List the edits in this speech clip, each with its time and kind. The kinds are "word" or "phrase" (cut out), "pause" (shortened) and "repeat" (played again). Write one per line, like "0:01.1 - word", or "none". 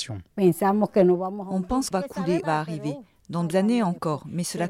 0:01.9 - word
0:02.4 - phrase
0:03.5 - word